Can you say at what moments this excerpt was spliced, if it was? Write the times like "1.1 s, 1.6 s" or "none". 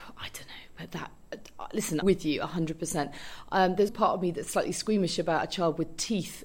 2.0 s, 3.9 s

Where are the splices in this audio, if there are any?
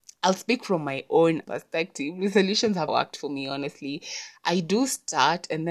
1.4 s, 2.9 s

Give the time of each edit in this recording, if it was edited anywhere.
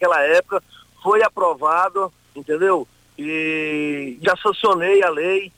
4.2 s

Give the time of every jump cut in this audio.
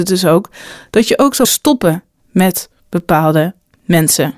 1.4 s

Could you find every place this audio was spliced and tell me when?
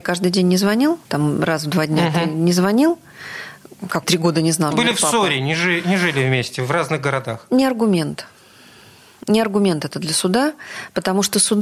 1.0 s, 4.0 s, 4.7 s

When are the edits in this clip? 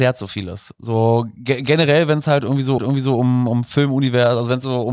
2.8 s

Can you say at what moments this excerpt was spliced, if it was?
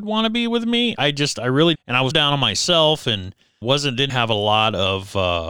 1.0 s, 1.7 s, 2.1 s, 3.6 s, 4.1 s

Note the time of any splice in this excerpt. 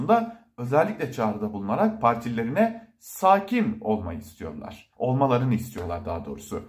4.9 s

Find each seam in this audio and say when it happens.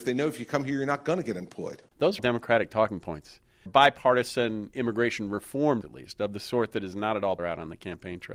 1.9 s, 2.2 s, 3.7 s, 5.8 s, 7.4 s

